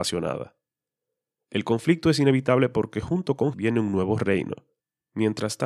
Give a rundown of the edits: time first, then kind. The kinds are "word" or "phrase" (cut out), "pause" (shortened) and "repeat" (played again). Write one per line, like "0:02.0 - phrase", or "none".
0:03.5 - word